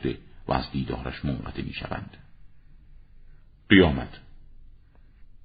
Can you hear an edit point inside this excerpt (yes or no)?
no